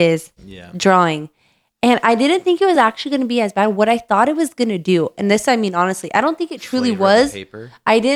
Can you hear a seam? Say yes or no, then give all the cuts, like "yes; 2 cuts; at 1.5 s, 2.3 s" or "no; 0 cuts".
no; 0 cuts